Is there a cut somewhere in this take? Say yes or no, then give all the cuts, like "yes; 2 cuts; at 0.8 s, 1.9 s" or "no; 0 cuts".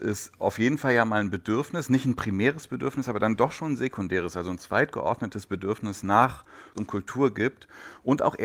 yes; 1 cut; at 6.7 s